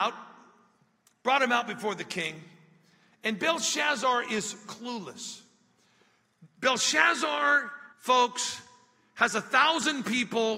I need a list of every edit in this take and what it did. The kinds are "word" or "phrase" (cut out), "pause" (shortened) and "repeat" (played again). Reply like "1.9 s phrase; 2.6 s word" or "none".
7.9 s pause

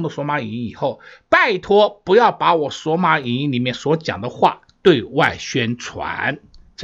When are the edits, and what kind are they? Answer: none

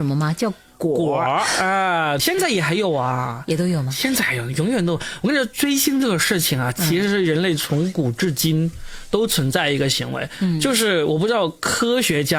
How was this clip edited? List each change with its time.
2.2 s word

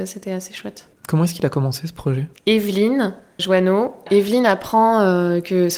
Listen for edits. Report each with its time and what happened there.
1.0 s pause; 3.4 s word

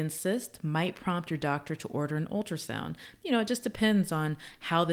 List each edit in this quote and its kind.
none

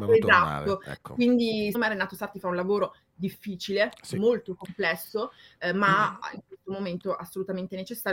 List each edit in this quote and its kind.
1.7 s word

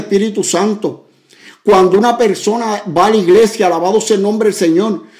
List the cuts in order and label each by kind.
none

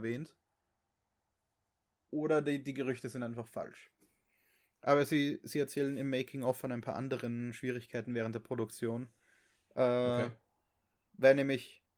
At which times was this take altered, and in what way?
none

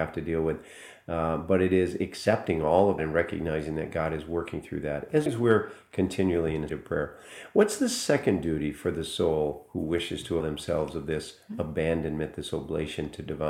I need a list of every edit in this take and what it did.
3.0 s word; 5.3 s word; 6.7 s word; 10.4 s word

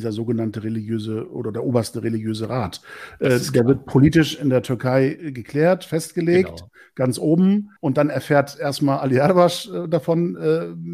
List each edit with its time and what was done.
7.8 s pause

